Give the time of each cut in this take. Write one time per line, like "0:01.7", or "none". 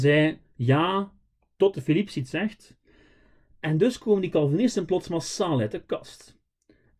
none